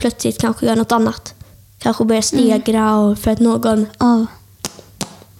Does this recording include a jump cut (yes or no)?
yes